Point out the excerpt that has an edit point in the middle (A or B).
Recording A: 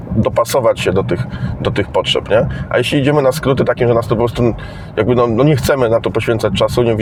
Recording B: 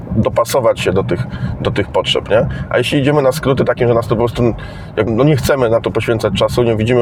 B